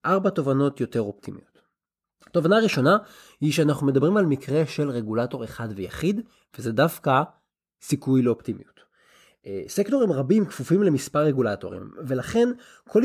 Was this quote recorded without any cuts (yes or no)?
yes